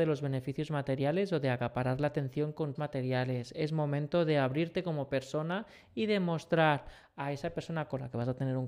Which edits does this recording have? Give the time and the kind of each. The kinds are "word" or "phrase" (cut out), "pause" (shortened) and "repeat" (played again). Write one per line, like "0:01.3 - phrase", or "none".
0:02.7 - word